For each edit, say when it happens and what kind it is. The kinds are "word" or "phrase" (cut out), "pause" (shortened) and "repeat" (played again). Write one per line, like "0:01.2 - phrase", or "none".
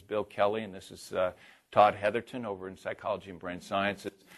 none